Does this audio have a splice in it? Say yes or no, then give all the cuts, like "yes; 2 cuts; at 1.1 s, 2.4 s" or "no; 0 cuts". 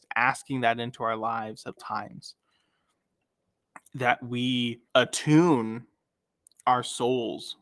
yes; 2 cuts; at 1.8 s, 4.9 s